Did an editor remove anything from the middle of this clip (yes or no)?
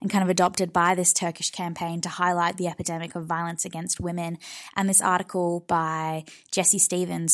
no